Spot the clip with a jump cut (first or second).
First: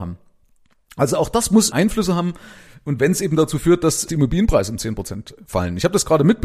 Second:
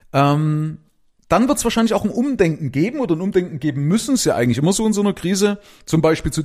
first